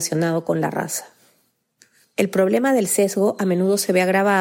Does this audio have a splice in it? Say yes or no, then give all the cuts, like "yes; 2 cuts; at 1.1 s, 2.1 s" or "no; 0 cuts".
no; 0 cuts